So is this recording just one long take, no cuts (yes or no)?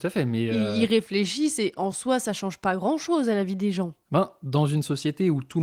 yes